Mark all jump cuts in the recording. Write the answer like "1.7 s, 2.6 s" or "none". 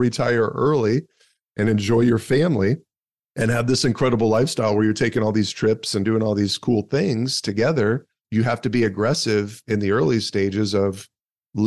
8.2 s